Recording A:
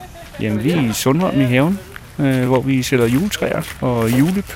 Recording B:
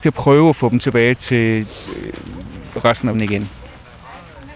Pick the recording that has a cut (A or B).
B